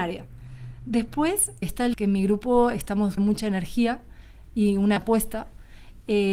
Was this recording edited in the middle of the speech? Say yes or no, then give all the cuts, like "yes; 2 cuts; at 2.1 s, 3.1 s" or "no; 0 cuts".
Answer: yes; 4 cuts; at 1.6 s, 1.9 s, 3.2 s, 5.0 s